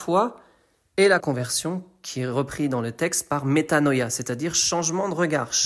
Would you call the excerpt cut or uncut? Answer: cut